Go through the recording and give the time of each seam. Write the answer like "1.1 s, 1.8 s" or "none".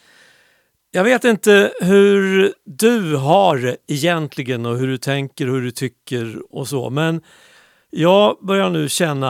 none